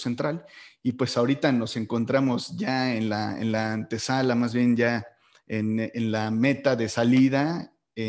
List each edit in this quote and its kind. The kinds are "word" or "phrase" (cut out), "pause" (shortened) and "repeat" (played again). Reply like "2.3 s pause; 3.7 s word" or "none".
none